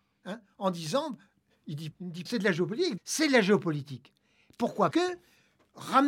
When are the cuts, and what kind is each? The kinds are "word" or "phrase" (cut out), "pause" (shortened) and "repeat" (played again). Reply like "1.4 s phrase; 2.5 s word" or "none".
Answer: 1.9 s word; 2.3 s word; 3.0 s word; 4.9 s word